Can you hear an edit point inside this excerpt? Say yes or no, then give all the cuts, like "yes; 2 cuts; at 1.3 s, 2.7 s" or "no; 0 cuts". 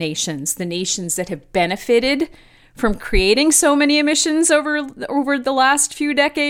no; 0 cuts